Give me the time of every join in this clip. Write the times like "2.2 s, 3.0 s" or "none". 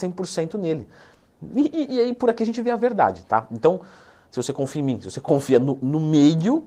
none